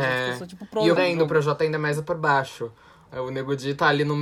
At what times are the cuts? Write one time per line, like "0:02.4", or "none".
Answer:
0:01.0

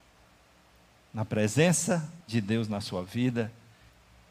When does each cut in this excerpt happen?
0:02.2

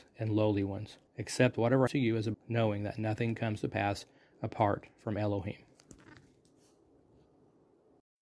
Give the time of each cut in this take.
0:01.1
0:01.9
0:02.3

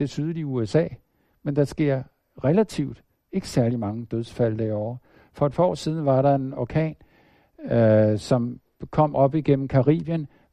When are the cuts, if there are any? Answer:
none

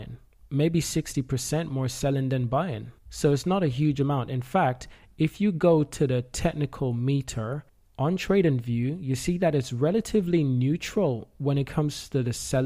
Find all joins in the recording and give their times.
0:03.0
0:07.7

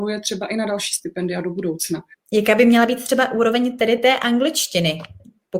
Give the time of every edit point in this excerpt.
none

